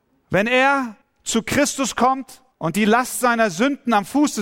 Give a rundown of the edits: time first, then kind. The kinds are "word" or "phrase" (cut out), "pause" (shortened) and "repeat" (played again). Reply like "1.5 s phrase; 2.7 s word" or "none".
1.0 s pause; 2.5 s pause